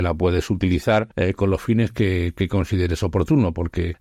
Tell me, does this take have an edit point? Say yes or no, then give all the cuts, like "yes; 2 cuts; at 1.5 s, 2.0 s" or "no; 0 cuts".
no; 0 cuts